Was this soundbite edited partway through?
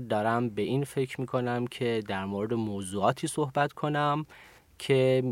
no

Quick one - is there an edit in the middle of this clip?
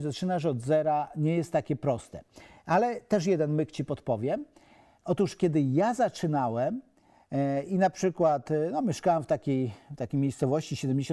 no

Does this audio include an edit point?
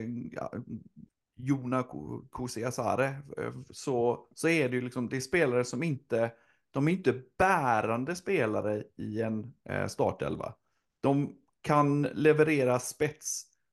no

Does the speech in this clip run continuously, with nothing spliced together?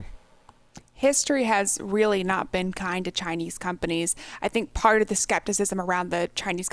yes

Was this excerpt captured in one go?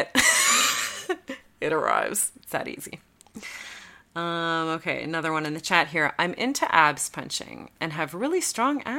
yes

